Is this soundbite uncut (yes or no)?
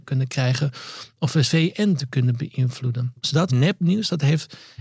no